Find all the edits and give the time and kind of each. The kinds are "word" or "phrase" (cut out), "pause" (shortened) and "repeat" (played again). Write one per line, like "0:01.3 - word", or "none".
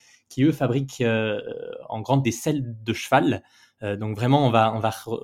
0:02.2 - word